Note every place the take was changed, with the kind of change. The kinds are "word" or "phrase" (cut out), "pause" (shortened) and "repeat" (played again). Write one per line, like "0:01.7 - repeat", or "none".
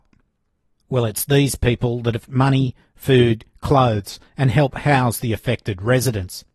0:02.3 - phrase